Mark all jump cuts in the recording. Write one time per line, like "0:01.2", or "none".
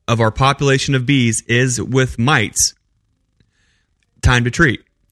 none